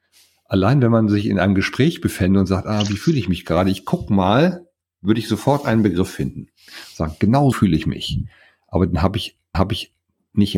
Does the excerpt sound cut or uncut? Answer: cut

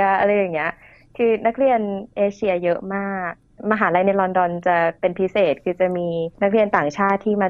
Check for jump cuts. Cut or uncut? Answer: cut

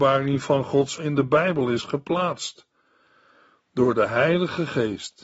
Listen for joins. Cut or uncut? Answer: cut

